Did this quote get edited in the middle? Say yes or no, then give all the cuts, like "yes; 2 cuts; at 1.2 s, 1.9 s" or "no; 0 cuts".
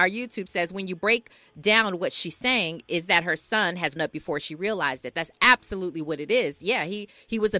yes; 1 cut; at 4.0 s